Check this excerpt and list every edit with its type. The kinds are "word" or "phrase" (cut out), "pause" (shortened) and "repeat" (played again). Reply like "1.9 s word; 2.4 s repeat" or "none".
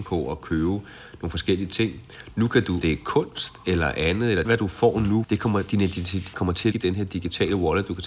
2.8 s word; 4.5 s phrase; 5.2 s word; 6.3 s word; 6.7 s word